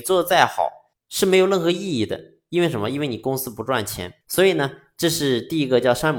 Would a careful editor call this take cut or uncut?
cut